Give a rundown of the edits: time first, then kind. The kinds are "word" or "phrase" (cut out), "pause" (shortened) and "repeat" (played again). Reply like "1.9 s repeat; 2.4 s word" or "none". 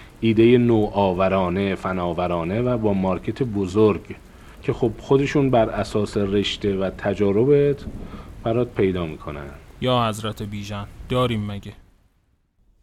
4.5 s pause